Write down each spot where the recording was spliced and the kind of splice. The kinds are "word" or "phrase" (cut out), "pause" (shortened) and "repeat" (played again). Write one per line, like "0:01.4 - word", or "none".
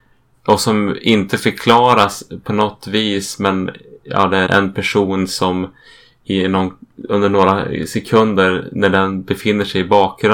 0:04.5 - word

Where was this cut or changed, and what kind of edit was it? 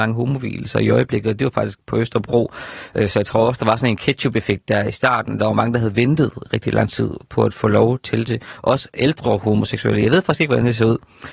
none

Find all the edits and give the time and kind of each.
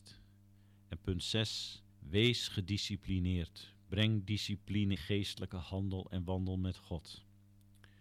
0:01.9 - pause
0:05.0 - phrase

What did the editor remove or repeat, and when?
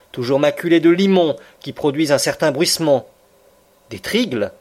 none

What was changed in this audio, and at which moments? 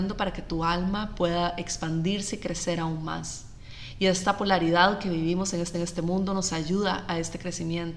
0:05.7 - repeat

